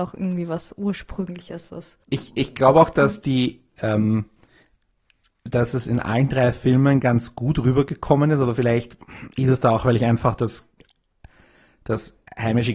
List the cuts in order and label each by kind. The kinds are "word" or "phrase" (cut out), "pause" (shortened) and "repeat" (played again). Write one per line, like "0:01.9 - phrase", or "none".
0:02.0 - pause